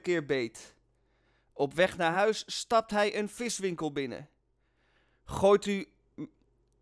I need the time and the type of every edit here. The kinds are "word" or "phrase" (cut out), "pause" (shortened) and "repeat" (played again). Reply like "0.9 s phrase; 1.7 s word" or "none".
none